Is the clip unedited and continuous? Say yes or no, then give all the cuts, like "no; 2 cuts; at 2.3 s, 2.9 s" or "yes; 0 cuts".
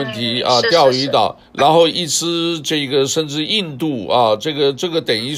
no; 1 cut; at 1.5 s